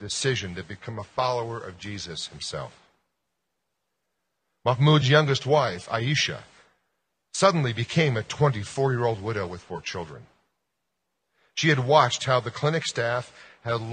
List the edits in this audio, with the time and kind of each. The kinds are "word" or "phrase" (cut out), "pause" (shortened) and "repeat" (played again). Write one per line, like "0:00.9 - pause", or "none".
none